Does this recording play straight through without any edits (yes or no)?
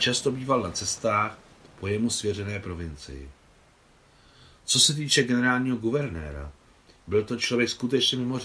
yes